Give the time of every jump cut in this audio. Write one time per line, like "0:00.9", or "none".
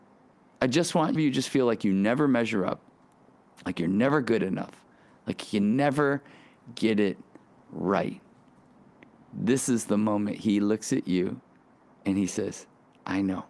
0:01.1